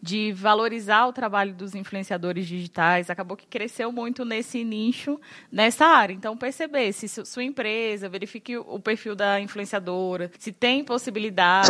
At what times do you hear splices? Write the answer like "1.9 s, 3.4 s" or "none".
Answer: 10.3 s